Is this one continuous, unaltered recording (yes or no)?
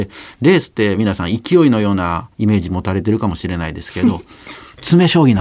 no